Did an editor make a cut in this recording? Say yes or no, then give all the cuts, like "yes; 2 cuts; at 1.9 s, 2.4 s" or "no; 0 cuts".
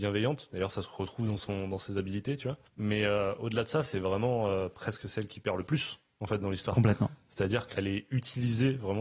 yes; 2 cuts; at 2.7 s, 7.7 s